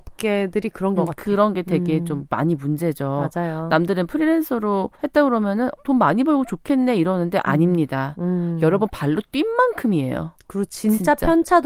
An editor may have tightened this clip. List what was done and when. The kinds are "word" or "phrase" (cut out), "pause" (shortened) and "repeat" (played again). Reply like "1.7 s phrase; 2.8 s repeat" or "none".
1.0 s phrase; 4.9 s pause; 5.8 s word